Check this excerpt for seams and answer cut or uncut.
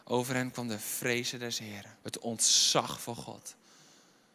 cut